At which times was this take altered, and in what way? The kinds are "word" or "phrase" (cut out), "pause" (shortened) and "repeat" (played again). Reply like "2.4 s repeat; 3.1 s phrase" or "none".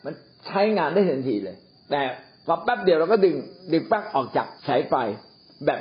1.8 s pause; 4.6 s pause